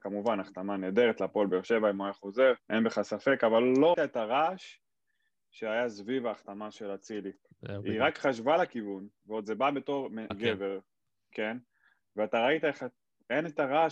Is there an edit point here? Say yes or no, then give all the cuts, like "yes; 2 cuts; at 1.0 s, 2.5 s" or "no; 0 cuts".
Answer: yes; 3 cuts; at 2.6 s, 3.9 s, 10.3 s